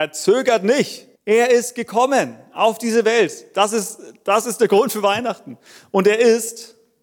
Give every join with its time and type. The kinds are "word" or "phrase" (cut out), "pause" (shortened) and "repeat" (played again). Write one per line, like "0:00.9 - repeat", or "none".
0:01.2 - pause